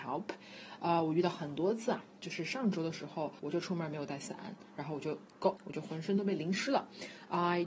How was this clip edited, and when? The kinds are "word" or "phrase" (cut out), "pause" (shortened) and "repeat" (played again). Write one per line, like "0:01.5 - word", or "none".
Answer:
0:03.4 - pause
0:05.6 - word